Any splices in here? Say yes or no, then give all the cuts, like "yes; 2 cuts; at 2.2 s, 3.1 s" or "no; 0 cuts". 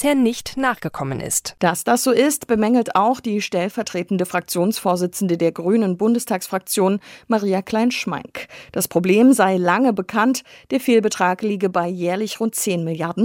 no; 0 cuts